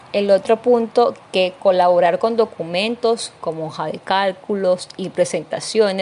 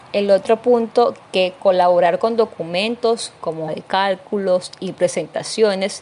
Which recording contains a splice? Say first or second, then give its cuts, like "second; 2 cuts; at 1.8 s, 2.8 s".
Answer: second; 1 cut; at 3.7 s